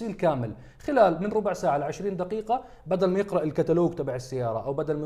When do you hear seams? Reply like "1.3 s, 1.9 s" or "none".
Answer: none